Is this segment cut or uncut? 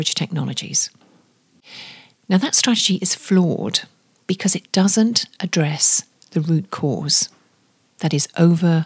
uncut